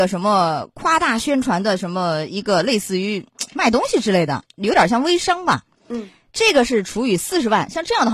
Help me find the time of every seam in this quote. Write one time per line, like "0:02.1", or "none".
0:04.5